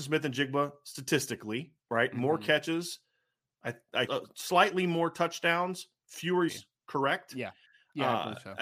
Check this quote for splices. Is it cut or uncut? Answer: cut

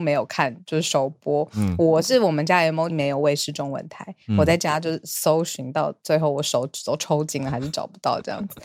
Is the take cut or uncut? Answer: cut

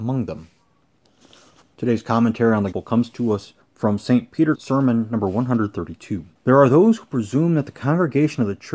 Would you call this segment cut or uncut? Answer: cut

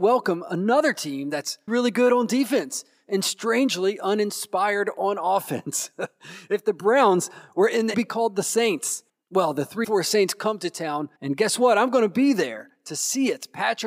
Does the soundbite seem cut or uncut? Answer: cut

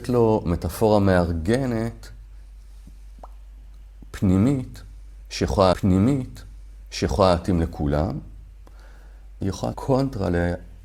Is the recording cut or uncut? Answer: cut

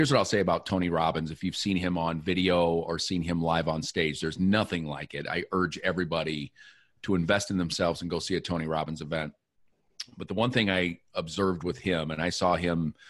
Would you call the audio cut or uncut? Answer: uncut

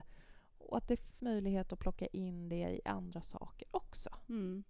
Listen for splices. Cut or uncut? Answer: cut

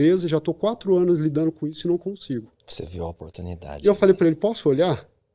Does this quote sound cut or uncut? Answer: uncut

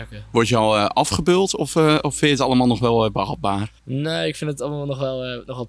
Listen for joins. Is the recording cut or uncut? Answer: cut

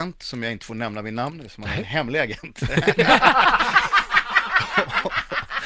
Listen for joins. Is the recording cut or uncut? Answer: uncut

